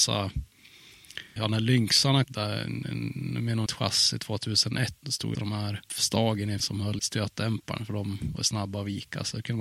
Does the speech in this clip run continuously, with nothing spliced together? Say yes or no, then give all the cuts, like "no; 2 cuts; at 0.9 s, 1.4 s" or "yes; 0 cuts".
no; 7 cuts; at 1.4 s, 2.2 s, 3.7 s, 5.0 s, 5.3 s, 6.6 s, 7.0 s